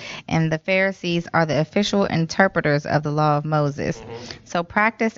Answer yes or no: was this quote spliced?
no